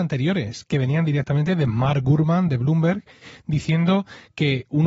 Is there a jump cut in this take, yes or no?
no